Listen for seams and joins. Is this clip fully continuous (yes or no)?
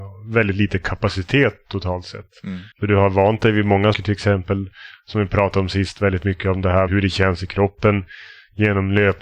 no